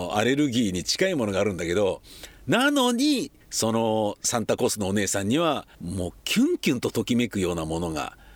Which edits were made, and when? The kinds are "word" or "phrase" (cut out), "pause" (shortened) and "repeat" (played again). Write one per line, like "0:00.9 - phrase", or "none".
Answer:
0:03.4 - pause
0:05.7 - pause